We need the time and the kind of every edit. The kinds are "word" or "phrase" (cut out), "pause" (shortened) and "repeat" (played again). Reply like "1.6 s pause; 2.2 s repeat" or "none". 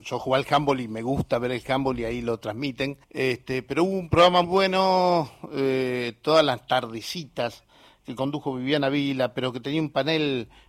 3.0 s pause; 4.4 s word